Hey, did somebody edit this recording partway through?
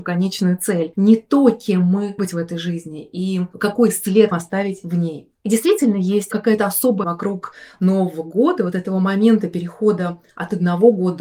yes; 3 cuts; at 2.2 s, 4.3 s, 7.0 s

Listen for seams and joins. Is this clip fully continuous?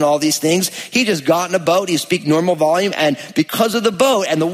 yes; 0 cuts

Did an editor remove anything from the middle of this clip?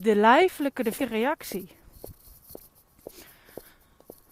yes; 1 cut; at 1.0 s

